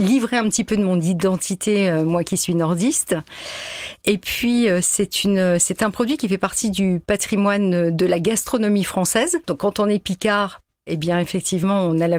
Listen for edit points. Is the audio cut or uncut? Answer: cut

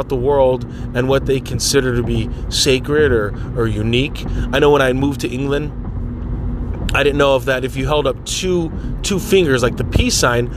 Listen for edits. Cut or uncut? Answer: uncut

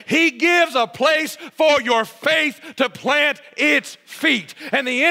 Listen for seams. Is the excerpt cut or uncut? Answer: uncut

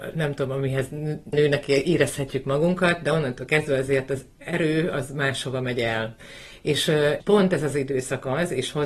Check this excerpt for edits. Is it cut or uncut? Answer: cut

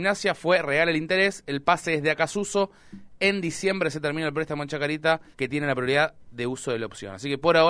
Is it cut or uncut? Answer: cut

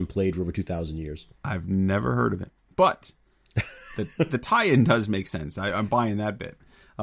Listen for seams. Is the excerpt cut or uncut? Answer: uncut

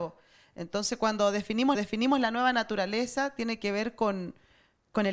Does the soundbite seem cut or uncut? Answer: cut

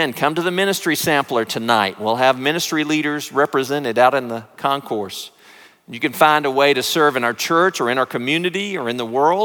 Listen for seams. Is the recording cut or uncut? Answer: uncut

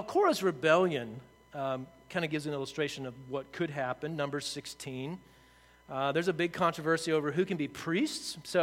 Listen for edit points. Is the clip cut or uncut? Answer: uncut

